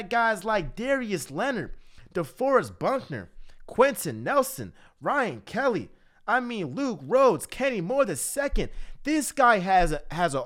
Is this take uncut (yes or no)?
yes